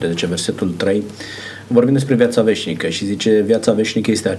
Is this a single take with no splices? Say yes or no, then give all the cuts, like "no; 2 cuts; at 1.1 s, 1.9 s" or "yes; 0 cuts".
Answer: yes; 0 cuts